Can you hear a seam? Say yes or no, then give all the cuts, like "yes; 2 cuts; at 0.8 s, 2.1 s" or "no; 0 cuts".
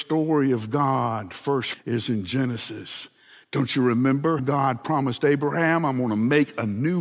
yes; 2 cuts; at 1.7 s, 4.4 s